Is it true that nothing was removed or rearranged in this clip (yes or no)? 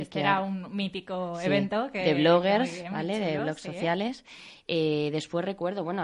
yes